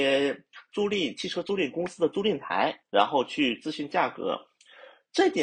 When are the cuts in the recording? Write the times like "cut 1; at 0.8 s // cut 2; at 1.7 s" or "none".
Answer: cut 1; at 2.8 s